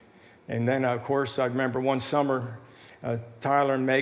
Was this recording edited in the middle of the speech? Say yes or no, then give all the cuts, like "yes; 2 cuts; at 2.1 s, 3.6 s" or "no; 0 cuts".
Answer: no; 0 cuts